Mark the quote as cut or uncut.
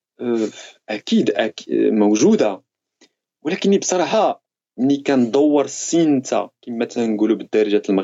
uncut